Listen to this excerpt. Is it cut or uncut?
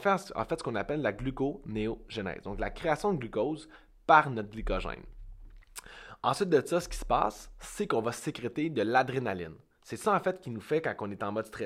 uncut